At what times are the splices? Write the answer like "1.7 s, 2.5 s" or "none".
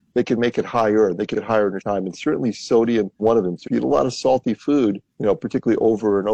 1.3 s, 1.8 s, 3.2 s, 3.6 s, 5.1 s